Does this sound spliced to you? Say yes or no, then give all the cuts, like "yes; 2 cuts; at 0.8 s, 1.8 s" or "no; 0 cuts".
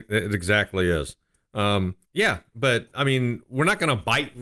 yes; 1 cut; at 2.0 s